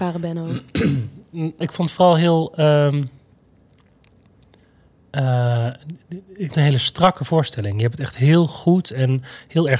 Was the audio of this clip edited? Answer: yes; 2 cuts; at 1.6 s, 6.5 s

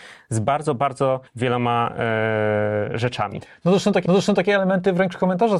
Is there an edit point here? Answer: yes; 2 cuts; at 1.3 s, 4.1 s

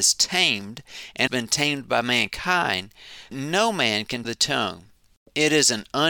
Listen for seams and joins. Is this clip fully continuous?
no; 3 cuts; at 1.3 s, 3.3 s, 4.2 s

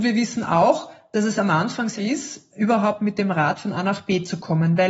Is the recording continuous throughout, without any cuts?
no; 1 cut; at 2.0 s

